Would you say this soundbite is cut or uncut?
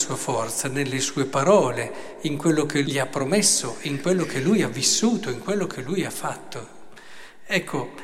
cut